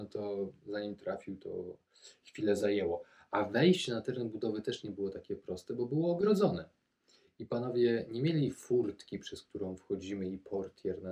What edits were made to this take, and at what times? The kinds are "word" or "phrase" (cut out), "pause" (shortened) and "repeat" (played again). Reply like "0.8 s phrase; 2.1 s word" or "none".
none